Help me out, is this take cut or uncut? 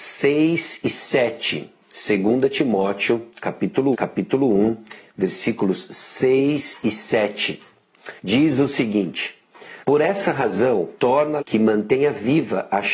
cut